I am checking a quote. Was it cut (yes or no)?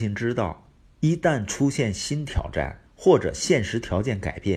yes